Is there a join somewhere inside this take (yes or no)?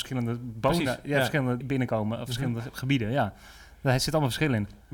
yes